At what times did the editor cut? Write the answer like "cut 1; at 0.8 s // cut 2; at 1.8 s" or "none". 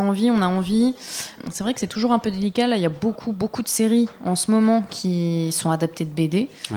none

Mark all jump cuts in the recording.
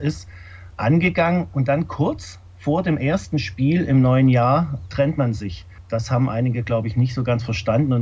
none

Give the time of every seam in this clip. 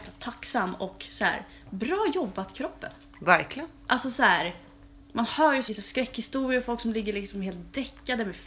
cut 1; at 3.8 s // cut 2; at 5.0 s // cut 3; at 5.7 s

